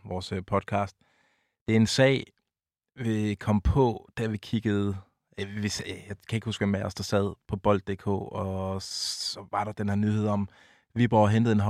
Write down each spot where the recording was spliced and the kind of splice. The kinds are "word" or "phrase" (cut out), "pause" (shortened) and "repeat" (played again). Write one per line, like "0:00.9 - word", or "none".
none